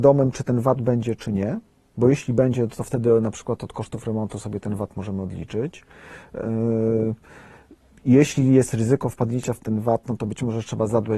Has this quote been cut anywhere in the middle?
no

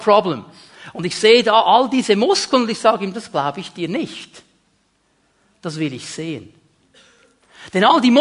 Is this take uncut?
yes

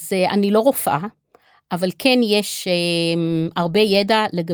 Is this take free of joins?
yes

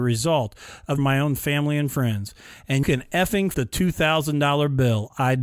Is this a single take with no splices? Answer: no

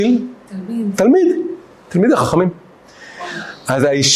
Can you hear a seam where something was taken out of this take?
no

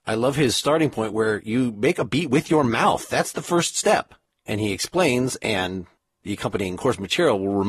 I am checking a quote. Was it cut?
no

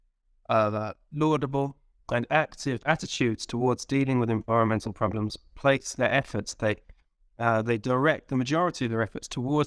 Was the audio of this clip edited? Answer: no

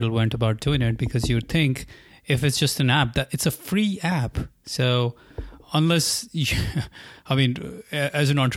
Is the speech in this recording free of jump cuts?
no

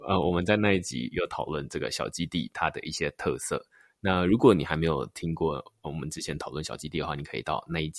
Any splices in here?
no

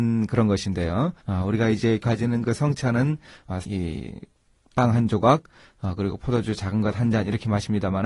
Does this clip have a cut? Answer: yes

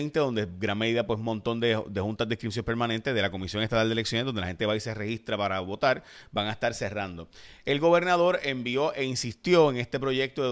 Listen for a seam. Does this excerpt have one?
no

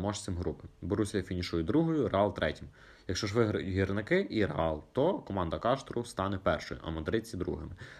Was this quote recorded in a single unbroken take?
yes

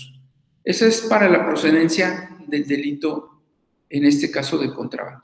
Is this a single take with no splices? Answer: yes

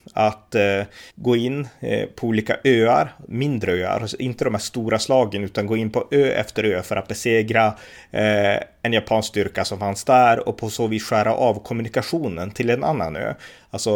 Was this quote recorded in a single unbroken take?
no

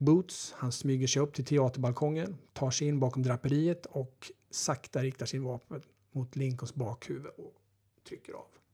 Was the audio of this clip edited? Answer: no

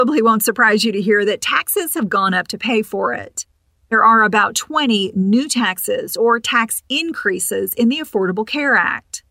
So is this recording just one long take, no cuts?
yes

